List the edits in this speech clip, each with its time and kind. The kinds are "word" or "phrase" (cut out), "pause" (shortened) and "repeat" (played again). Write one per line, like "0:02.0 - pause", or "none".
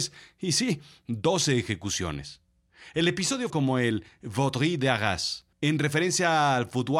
0:03.5 - phrase
0:05.5 - pause